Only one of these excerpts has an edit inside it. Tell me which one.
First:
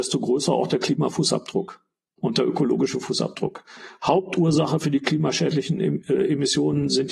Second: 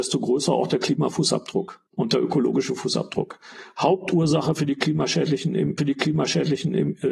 second; 2 cuts; at 1.9 s, 5.8 s

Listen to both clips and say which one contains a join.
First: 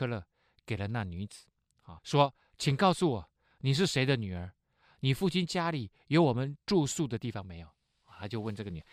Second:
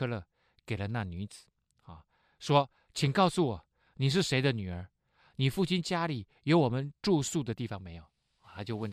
first; 1 cut; at 2.0 s

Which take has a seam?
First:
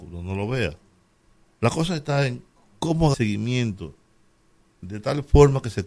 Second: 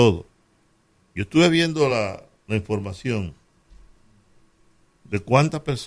first; 1 cut; at 3.1 s

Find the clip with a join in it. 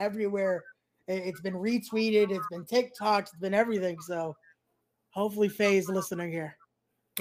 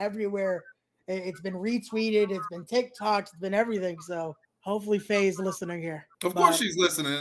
second; 2 cuts; at 4.4 s, 6.1 s

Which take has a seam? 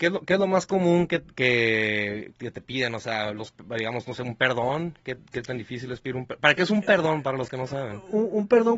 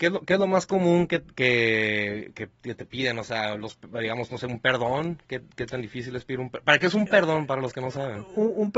first; 1 cut; at 2.3 s

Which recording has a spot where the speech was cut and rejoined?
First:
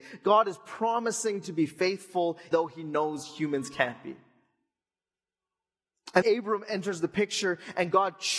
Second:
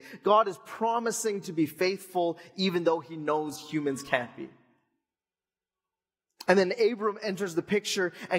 first; 2 cuts; at 2.5 s, 6.2 s

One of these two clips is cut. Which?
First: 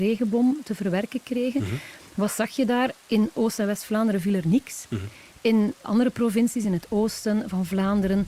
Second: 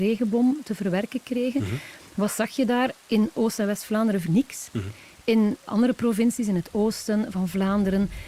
second; 1 cut; at 4.3 s

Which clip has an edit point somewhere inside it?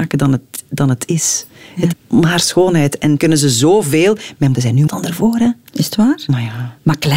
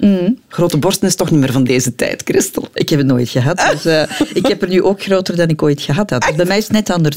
first; 4 cuts; at 1.9 s, 3.2 s, 4.5 s, 4.9 s

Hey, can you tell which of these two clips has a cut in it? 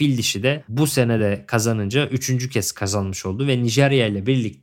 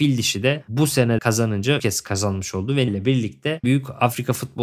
second; 4 cuts; at 1.2 s, 1.8 s, 2.9 s, 3.6 s

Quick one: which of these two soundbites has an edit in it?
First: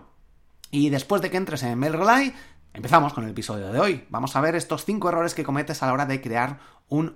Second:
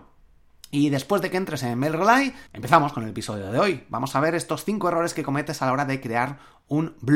second; 1 cut; at 2.5 s

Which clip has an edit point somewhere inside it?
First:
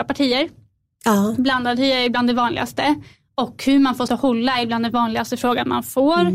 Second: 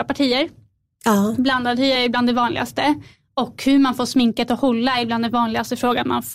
first; 1 cut; at 4.1 s

